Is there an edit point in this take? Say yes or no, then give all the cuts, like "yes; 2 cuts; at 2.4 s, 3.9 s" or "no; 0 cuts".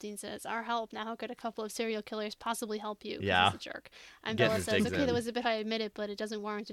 yes; 1 cut; at 5.4 s